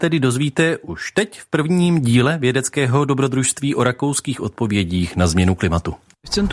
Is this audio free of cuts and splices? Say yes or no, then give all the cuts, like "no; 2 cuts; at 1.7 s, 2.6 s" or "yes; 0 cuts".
yes; 0 cuts